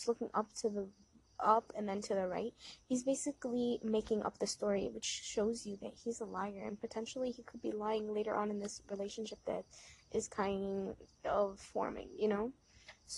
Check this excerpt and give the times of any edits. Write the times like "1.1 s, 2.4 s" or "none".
none